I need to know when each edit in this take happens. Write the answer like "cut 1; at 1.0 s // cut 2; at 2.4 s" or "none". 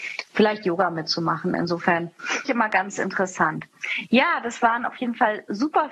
cut 1; at 2.5 s